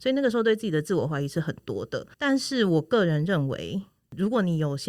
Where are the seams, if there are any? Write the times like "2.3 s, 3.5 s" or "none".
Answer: 2.1 s